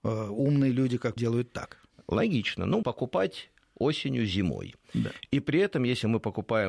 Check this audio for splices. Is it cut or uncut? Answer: cut